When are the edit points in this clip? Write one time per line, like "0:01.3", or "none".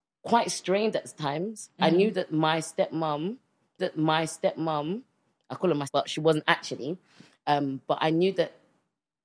0:03.8
0:05.9